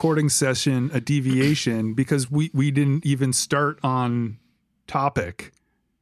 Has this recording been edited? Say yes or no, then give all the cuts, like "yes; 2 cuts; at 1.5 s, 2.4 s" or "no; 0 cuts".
no; 0 cuts